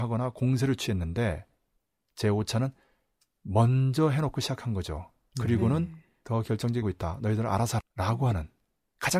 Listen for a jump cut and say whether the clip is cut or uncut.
cut